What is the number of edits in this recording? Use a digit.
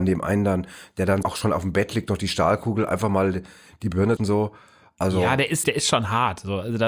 3